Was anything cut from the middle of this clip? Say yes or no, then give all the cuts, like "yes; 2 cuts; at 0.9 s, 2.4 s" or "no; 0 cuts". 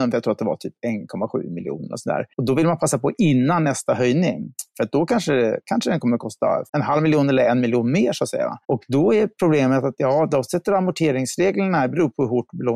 yes; 3 cuts; at 2.3 s, 6.7 s, 8.6 s